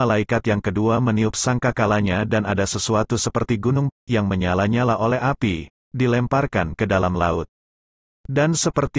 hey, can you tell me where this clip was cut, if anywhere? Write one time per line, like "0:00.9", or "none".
0:03.9